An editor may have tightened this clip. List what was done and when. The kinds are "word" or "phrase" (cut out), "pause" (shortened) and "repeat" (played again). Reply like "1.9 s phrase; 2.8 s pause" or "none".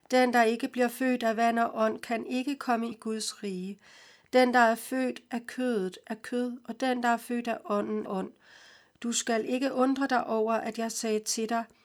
2.9 s word; 8.1 s word

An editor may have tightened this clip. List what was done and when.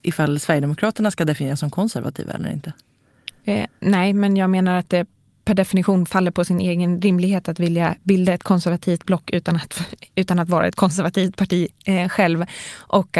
none

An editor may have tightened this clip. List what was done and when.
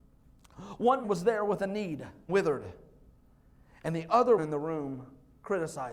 1.0 s word; 2.3 s word; 4.4 s word

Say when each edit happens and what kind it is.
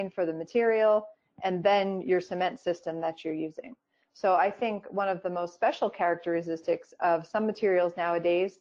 none

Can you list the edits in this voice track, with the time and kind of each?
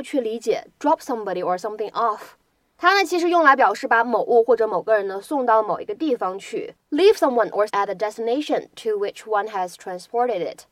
6.8 s pause; 7.7 s word

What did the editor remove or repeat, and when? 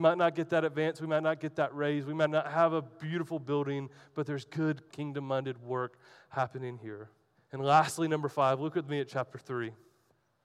4.9 s word; 7.3 s pause

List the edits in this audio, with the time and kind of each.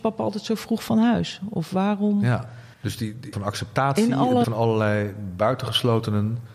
2.7 s pause; 3.3 s phrase; 4.4 s word

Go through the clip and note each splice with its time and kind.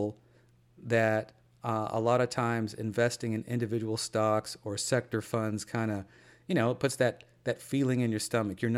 none

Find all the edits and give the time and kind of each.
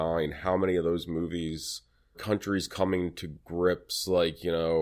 2.1 s word

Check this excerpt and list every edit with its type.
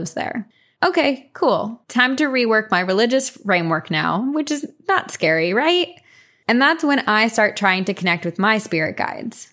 none

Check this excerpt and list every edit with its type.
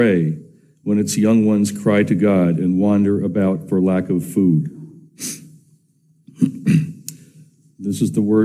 none

